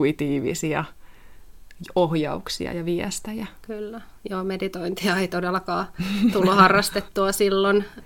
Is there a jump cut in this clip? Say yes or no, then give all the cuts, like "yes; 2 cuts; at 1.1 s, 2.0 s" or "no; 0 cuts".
no; 0 cuts